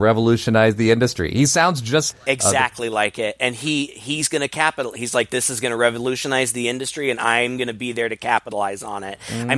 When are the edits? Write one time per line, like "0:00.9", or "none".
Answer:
0:02.1